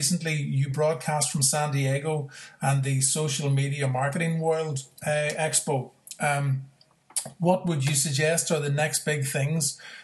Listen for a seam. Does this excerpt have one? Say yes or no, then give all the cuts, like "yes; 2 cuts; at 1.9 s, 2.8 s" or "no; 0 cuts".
no; 0 cuts